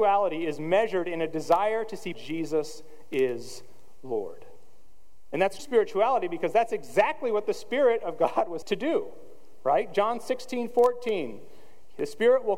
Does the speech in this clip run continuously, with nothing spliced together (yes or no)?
no